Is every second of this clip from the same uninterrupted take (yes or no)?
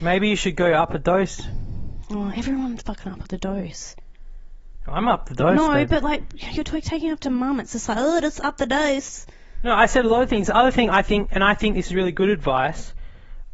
yes